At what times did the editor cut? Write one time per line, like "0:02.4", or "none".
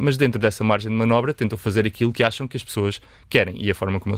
none